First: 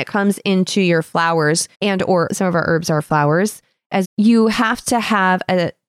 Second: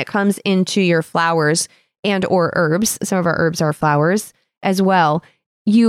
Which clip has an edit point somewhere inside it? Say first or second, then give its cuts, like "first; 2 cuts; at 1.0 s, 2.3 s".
first; 3 cuts; at 1.7 s, 2.3 s, 4.0 s